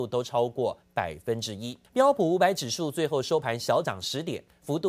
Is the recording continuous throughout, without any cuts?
no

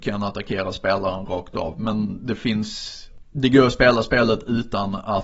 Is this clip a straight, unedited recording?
yes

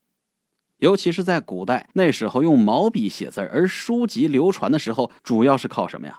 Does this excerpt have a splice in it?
yes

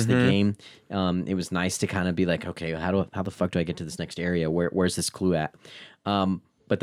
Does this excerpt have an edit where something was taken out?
no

